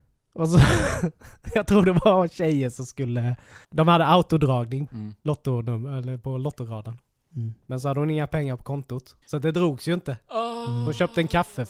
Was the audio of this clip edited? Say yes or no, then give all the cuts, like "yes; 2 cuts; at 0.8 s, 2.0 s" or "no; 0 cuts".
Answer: yes; 3 cuts; at 3.6 s, 4.9 s, 9.2 s